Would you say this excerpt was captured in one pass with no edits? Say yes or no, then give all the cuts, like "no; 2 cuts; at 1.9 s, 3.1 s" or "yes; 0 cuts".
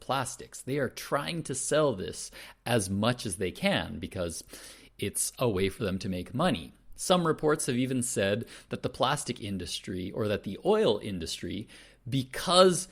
yes; 0 cuts